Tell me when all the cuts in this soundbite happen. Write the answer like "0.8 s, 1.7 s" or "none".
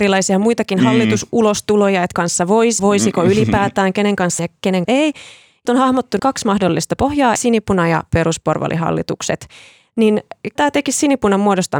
2.1 s, 2.8 s, 4.4 s, 4.8 s, 5.7 s, 6.2 s, 7.4 s, 10.6 s